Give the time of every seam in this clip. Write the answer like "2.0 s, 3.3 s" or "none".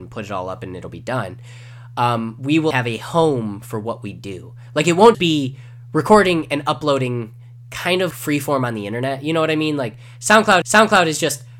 2.7 s, 5.1 s, 8.1 s, 10.6 s